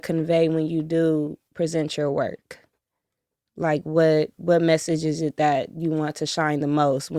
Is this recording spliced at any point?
no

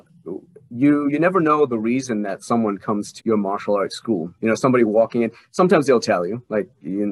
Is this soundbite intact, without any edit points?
no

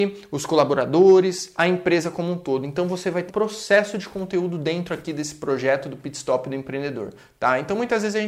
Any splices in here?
yes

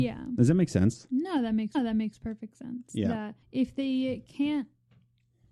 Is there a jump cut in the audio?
yes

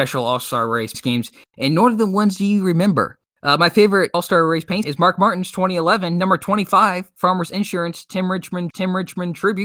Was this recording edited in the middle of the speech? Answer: yes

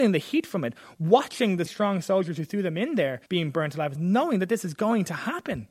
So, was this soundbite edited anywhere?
yes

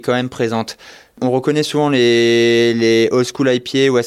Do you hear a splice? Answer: no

